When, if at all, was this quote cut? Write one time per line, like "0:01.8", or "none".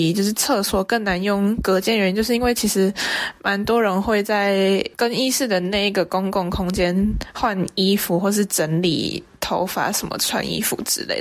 0:04.9